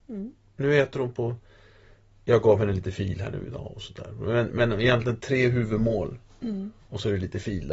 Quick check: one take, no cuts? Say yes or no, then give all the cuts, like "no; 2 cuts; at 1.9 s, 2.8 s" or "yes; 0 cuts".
yes; 0 cuts